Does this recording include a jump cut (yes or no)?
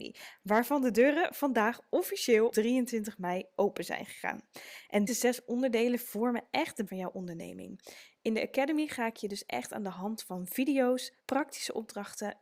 yes